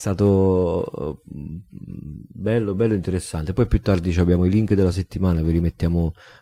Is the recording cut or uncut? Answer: uncut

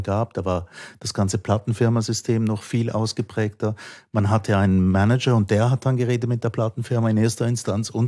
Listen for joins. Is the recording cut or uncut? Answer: uncut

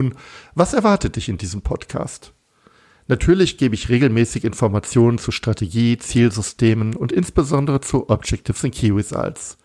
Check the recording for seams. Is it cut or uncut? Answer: uncut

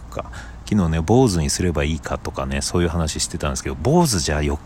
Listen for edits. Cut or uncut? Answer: uncut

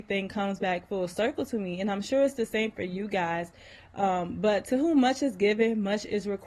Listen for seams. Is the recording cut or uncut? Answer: uncut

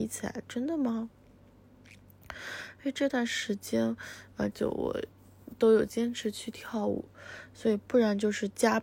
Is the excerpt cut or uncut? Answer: cut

